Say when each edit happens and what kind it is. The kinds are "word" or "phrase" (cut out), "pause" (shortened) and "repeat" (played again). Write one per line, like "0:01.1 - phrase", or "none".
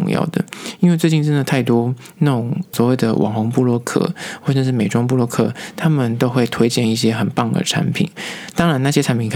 0:02.7 - word